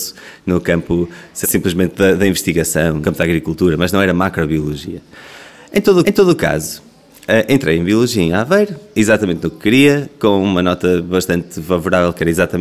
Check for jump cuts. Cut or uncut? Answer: cut